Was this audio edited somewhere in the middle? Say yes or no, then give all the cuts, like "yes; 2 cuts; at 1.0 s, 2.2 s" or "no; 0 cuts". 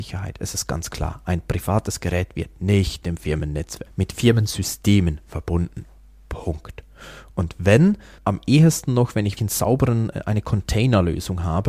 yes; 4 cuts; at 3.0 s, 3.9 s, 8.2 s, 9.4 s